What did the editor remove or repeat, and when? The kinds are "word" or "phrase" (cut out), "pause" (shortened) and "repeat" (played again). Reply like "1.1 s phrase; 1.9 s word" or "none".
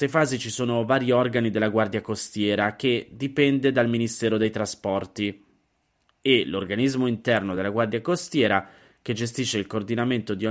none